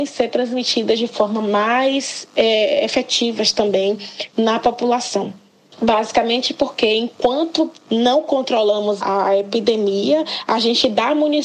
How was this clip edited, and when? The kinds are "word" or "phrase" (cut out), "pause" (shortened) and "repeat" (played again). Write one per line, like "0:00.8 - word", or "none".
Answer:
none